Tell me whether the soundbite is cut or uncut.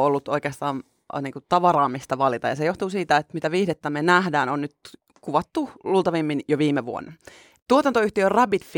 uncut